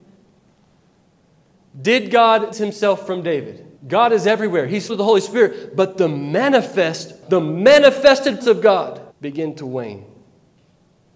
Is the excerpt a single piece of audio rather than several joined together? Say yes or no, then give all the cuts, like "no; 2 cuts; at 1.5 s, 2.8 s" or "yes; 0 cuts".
no; 6 cuts; at 2.5 s, 3.8 s, 4.9 s, 7.2 s, 8.4 s, 9.1 s